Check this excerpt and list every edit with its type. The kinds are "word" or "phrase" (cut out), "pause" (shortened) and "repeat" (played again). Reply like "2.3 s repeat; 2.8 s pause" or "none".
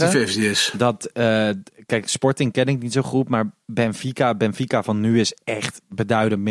none